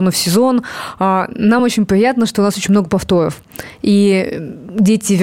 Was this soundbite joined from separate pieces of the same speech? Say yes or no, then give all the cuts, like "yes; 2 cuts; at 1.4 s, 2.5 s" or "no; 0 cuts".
no; 0 cuts